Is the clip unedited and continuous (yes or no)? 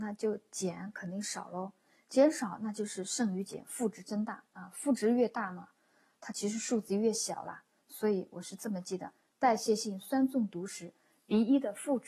yes